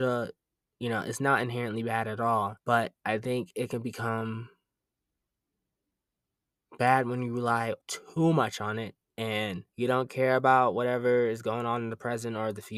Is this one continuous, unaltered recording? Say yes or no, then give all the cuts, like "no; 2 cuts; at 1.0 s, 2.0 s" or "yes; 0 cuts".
no; 3 cuts; at 2.6 s, 7.8 s, 9.7 s